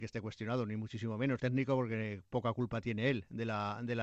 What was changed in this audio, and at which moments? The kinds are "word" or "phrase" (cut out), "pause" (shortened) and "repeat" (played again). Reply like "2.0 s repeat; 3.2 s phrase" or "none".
1.4 s word